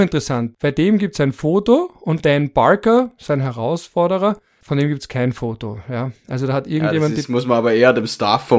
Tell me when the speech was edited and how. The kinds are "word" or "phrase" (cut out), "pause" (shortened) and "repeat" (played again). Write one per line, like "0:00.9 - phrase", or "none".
0:02.2 - word